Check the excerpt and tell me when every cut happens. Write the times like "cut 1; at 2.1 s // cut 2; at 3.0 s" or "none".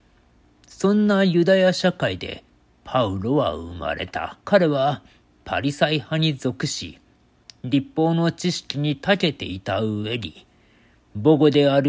cut 1; at 4.4 s